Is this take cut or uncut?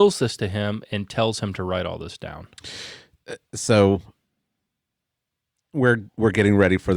uncut